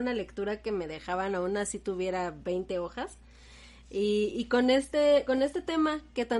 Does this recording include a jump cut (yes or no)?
no